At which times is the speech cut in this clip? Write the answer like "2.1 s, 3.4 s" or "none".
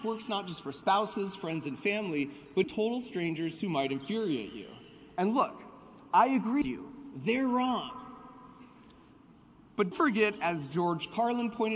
2.6 s, 6.6 s, 9.9 s